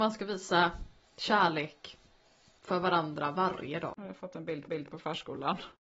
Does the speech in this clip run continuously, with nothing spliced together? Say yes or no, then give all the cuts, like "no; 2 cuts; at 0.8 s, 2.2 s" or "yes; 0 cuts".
no; 1 cut; at 4.7 s